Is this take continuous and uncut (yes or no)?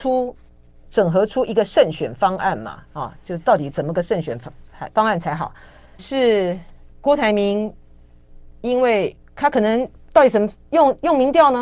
no